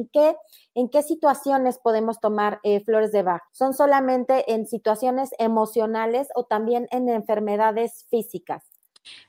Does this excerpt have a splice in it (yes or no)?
yes